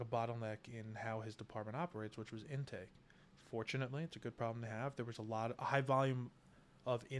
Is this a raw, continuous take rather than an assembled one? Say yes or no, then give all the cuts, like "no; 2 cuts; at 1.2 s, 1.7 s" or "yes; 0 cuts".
no; 1 cut; at 5.1 s